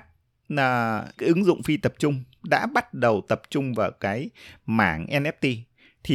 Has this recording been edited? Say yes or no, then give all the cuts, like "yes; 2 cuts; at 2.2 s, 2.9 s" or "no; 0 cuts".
yes; 1 cut; at 1.2 s